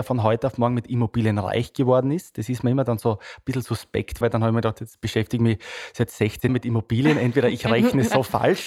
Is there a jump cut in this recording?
yes; 2 cuts; at 4.2 s, 6.5 s

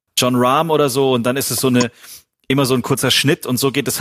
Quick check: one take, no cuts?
yes; 0 cuts

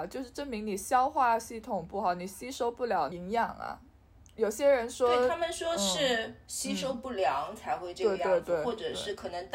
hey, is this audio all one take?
yes; 0 cuts

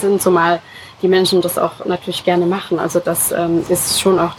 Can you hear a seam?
no; 0 cuts

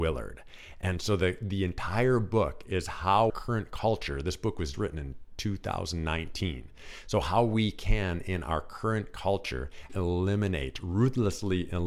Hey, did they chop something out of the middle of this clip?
yes; 3 cuts; at 3.3 s, 4.7 s, 9.9 s

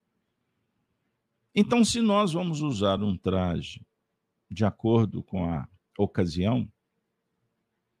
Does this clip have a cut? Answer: no; 0 cuts

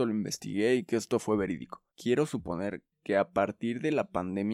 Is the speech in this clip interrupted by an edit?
yes; 2 cuts; at 1.9 s, 2.9 s

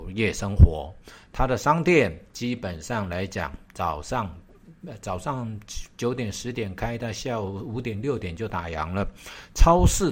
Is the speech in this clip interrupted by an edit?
no; 0 cuts

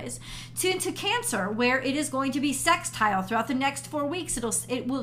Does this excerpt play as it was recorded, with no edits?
yes; 0 cuts

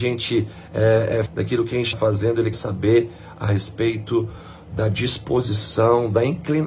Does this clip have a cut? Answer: yes; 3 cuts; at 1.3 s, 1.9 s, 2.5 s

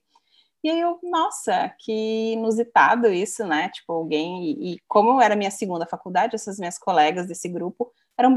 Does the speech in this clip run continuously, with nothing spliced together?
yes; 0 cuts

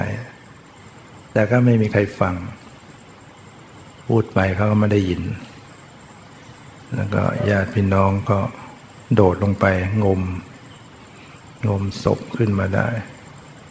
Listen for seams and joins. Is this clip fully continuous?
no; 3 cuts; at 1.2 s, 6.9 s, 9.1 s

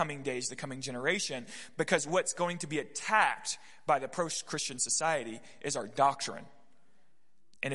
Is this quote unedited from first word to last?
yes; 0 cuts

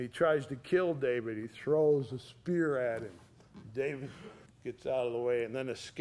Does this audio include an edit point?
yes; 1 cut; at 4.5 s

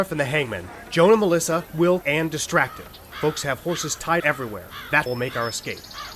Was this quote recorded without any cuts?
no; 4 cuts; at 1.7 s, 2.0 s, 4.2 s, 5.1 s

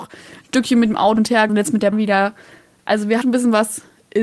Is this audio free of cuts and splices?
no; 4 cuts; at 1.2 s, 1.5 s, 1.9 s, 3.2 s

